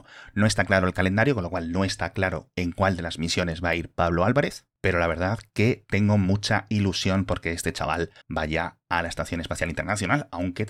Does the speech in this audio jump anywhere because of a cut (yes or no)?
yes